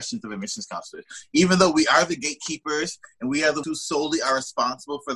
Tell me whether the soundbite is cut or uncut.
cut